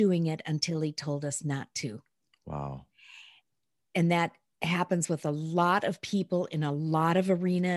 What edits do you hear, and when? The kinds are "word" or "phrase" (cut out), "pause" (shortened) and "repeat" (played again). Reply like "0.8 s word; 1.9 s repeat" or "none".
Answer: none